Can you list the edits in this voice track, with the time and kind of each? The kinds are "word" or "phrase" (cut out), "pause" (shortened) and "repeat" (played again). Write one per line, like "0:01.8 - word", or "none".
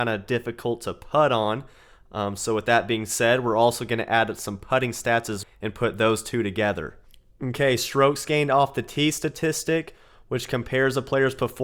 0:05.4 - word